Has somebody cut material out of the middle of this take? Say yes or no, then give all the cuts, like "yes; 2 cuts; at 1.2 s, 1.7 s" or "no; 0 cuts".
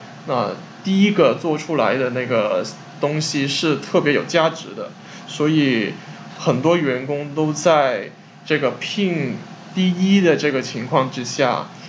no; 0 cuts